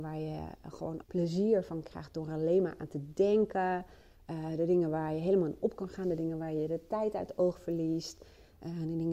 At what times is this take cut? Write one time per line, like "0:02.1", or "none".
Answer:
0:01.0